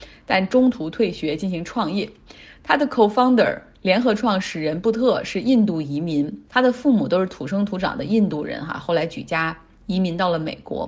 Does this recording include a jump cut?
no; 0 cuts

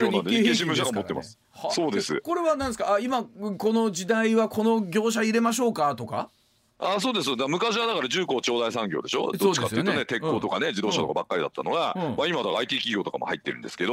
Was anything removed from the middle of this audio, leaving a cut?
no; 0 cuts

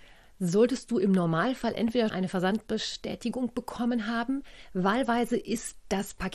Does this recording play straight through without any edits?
no; 1 cut; at 2.1 s

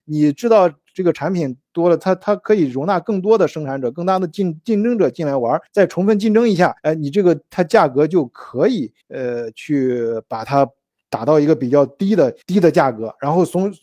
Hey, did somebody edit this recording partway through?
yes; 4 cuts; at 5.7 s, 6.8 s, 9.0 s, 12.4 s

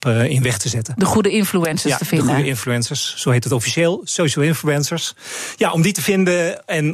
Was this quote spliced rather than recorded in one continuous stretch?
no; 0 cuts

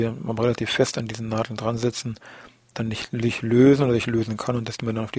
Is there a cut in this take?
no; 0 cuts

